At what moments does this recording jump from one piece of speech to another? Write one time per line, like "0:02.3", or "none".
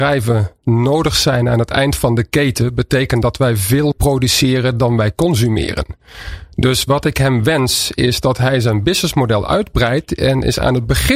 0:03.9